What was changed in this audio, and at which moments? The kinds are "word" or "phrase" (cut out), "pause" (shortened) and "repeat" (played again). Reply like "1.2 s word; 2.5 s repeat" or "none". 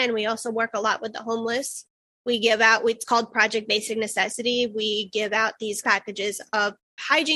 5.8 s word